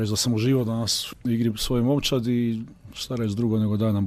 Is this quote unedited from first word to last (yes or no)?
yes